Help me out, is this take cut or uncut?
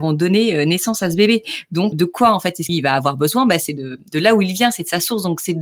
cut